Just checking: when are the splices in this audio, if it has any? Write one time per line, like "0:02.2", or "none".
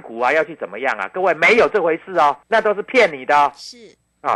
0:02.4